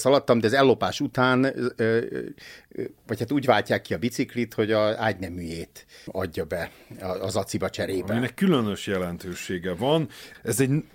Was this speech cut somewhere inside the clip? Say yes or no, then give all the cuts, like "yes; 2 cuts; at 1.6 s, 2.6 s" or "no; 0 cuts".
no; 0 cuts